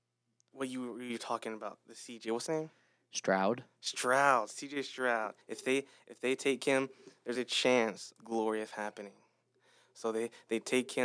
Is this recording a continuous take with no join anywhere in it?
no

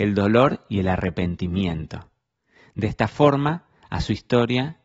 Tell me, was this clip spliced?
no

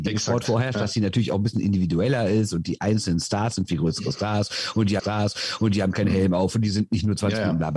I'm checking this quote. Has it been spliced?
yes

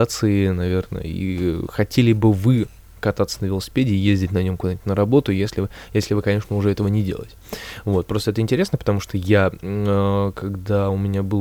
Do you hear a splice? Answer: no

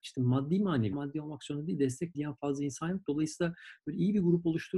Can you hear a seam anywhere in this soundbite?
yes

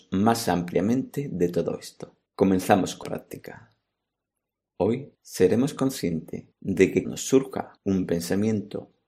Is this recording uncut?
no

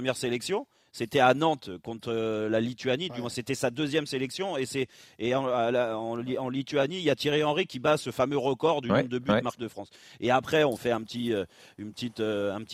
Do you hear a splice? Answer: yes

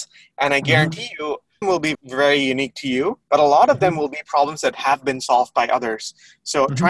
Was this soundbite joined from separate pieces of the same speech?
yes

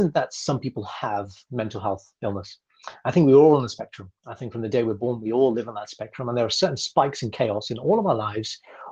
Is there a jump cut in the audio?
yes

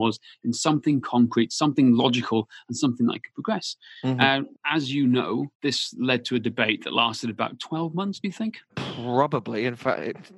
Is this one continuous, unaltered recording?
yes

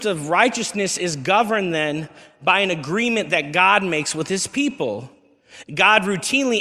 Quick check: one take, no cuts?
yes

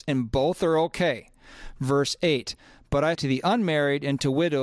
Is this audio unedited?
no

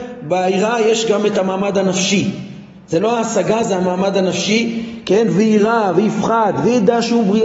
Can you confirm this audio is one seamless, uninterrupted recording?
yes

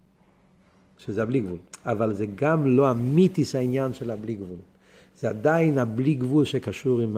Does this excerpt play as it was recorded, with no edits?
yes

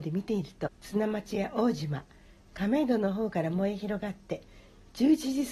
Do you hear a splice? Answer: no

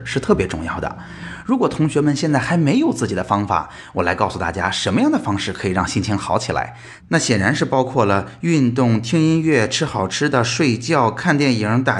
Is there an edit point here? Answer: no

